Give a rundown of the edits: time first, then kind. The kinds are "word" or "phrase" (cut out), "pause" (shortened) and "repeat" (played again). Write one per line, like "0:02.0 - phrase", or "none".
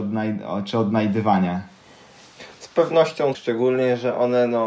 0:03.3 - word